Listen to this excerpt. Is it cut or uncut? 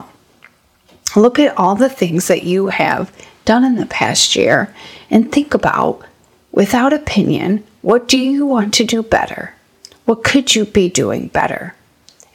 uncut